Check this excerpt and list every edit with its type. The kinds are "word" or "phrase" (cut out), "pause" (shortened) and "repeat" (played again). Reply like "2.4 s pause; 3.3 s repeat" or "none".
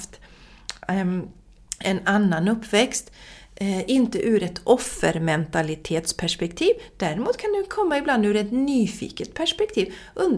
none